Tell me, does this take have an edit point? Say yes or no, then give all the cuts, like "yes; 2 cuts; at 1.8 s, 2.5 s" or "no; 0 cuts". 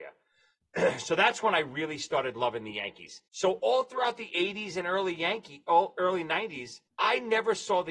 yes; 2 cuts; at 3.3 s, 6.9 s